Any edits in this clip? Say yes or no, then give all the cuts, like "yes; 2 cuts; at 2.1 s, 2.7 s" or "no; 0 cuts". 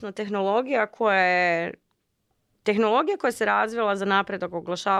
no; 0 cuts